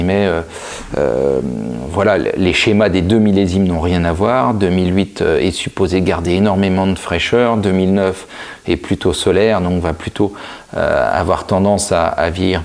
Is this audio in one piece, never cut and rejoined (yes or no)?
yes